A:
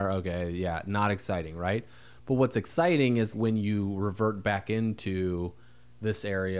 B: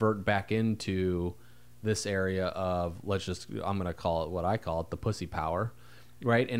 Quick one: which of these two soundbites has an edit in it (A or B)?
A